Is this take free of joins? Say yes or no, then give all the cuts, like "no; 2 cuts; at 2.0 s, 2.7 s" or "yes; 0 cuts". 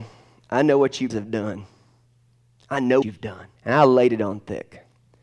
no; 3 cuts; at 1.1 s, 3.0 s, 3.6 s